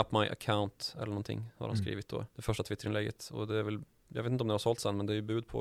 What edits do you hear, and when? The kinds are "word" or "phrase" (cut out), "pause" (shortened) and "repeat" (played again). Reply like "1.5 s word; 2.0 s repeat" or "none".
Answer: 2.3 s pause